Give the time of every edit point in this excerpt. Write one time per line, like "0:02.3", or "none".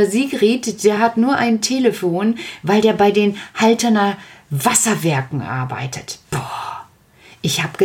none